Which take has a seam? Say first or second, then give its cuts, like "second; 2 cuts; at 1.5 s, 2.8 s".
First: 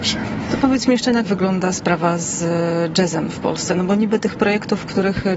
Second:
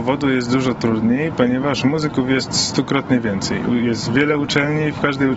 first; 1 cut; at 1.2 s